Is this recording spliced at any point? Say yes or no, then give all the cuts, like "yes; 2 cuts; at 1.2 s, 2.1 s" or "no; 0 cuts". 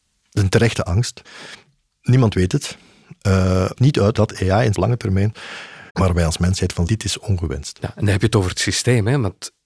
yes; 5 cuts; at 3.8 s, 4.1 s, 4.7 s, 5.9 s, 6.9 s